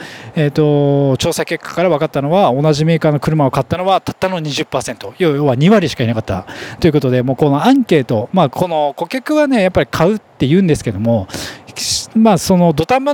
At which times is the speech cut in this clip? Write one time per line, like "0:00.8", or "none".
none